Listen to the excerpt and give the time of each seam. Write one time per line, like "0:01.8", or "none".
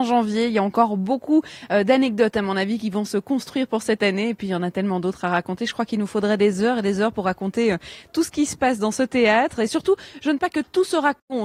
0:10.4